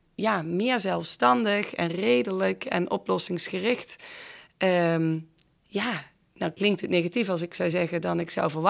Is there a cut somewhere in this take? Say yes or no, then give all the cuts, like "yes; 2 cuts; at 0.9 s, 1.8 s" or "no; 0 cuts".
no; 0 cuts